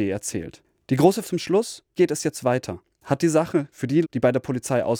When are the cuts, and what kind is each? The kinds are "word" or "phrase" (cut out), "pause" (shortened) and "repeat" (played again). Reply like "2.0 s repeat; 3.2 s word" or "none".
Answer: 1.2 s word; 2.0 s word; 3.7 s word; 4.0 s word